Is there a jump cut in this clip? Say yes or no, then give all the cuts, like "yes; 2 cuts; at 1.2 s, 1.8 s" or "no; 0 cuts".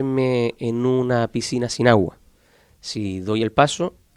no; 0 cuts